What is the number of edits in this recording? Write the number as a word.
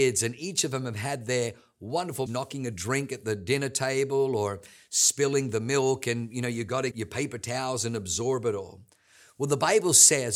two